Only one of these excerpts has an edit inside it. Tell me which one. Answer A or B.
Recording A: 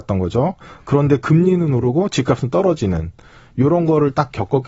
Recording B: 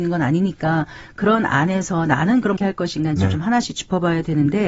B